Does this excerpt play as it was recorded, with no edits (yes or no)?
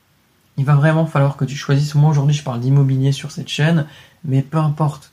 yes